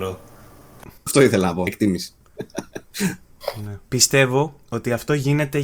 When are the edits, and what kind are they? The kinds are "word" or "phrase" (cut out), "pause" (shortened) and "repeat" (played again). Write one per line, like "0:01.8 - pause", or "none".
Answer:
0:01.0 - pause
0:01.7 - word
0:03.8 - pause